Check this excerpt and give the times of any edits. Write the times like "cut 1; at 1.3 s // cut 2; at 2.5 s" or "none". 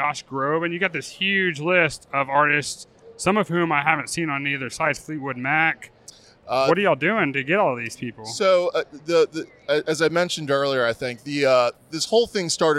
none